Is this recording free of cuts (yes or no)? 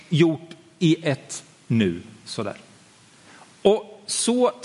yes